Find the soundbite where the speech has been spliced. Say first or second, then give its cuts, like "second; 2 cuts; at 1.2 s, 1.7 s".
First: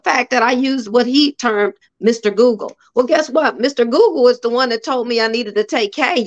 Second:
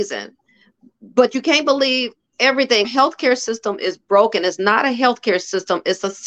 second; 1 cut; at 2.8 s